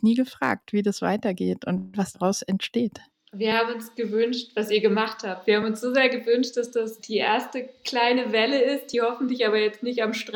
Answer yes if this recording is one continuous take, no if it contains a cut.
yes